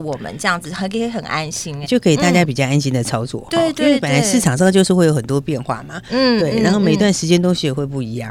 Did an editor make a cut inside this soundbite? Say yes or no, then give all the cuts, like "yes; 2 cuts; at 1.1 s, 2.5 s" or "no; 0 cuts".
yes; 1 cut; at 1.8 s